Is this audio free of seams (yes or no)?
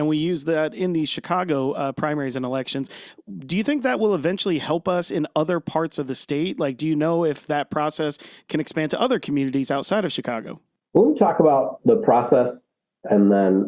yes